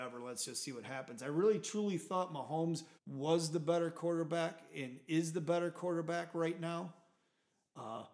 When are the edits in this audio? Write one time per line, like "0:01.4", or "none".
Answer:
0:03.0